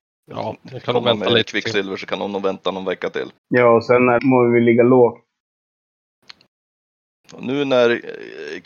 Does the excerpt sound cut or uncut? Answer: cut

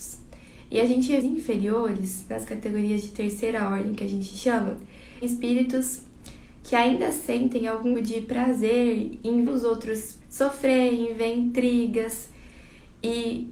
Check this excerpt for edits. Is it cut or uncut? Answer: cut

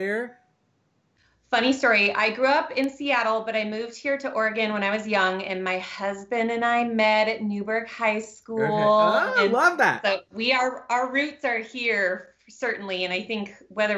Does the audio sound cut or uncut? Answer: uncut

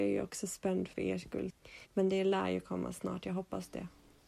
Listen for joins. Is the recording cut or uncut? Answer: cut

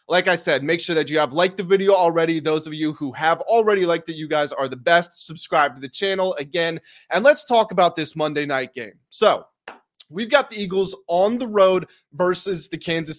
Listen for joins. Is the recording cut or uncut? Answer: uncut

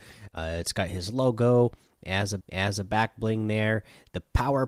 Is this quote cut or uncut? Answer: cut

